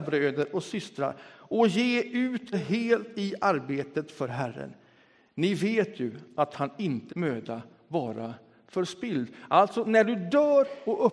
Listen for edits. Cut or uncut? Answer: cut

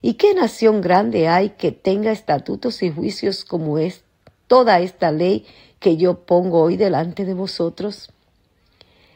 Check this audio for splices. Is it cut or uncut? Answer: uncut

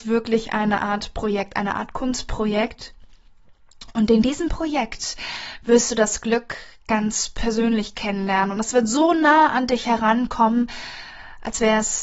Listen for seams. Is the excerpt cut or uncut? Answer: uncut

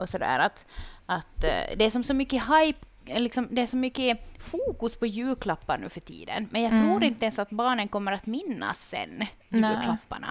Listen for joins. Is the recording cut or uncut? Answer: uncut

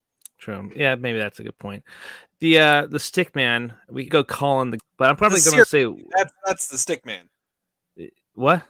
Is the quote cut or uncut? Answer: cut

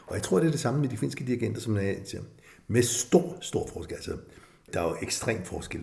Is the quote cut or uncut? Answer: uncut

